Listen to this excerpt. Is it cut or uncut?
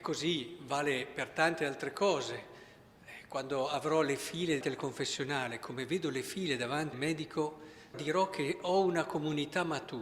cut